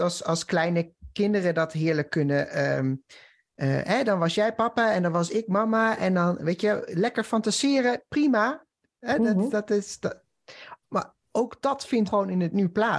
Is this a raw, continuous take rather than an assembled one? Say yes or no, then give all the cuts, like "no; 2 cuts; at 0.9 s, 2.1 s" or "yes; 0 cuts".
no; 1 cut; at 12.1 s